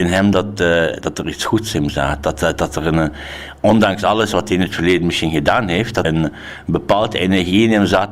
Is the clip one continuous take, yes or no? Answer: no